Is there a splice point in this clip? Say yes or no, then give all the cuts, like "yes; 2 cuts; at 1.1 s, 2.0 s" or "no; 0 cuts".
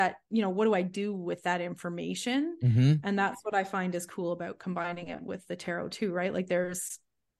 no; 0 cuts